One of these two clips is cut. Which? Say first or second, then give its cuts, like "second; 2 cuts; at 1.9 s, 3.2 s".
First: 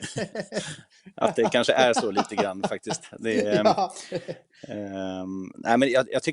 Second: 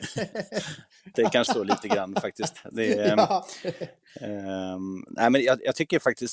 second; 2 cuts; at 1.1 s, 1.5 s